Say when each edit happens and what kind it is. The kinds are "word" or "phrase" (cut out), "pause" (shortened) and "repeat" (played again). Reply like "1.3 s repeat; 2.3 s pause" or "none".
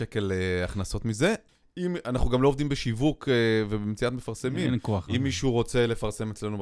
1.5 s pause